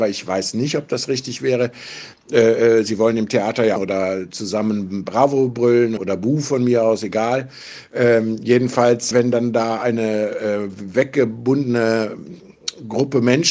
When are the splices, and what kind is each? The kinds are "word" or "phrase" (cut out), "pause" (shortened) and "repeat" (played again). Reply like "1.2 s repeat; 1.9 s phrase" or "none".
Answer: 3.8 s phrase; 6.0 s word; 9.1 s word